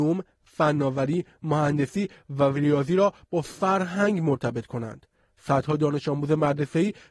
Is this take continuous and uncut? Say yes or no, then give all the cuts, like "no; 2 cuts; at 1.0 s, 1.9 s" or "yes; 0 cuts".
yes; 0 cuts